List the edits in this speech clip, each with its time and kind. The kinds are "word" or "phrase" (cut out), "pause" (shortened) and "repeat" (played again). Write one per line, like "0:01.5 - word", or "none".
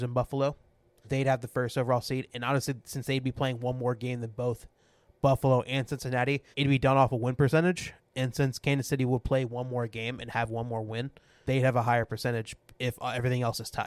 0:01.0 - word
0:06.5 - pause
0:11.4 - word